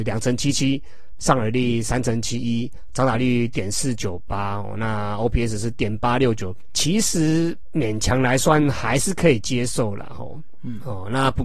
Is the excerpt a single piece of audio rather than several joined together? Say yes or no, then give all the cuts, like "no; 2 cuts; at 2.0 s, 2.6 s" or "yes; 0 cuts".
yes; 0 cuts